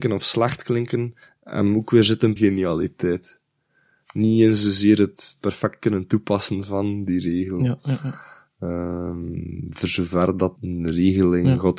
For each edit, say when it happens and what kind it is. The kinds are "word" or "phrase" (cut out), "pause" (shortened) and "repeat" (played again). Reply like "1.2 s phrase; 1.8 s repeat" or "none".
1.2 s pause; 2.4 s word; 10.6 s word